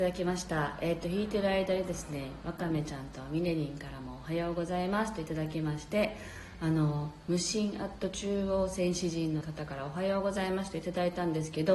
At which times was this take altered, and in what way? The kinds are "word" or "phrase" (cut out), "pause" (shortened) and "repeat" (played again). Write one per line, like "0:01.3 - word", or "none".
0:09.4 - word